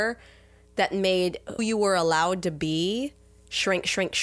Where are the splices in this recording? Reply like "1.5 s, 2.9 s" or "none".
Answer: 1.6 s